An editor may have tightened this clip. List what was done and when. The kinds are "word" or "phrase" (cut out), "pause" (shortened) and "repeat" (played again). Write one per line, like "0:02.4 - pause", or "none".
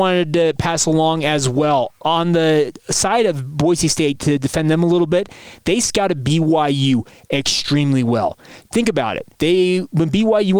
0:09.3 - pause